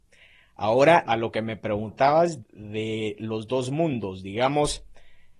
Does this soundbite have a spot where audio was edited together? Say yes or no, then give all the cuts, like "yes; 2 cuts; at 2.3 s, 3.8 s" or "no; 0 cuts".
yes; 2 cuts; at 1.0 s, 2.4 s